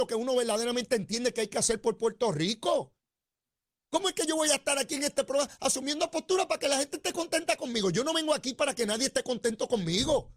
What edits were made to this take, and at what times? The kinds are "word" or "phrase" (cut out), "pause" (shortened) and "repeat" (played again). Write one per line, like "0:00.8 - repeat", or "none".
none